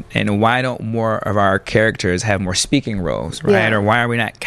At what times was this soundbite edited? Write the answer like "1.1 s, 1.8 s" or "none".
none